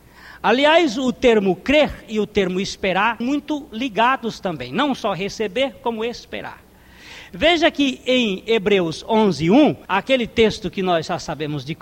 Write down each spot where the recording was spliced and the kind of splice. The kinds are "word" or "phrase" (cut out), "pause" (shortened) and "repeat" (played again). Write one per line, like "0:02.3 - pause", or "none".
0:03.2 - word
0:09.9 - pause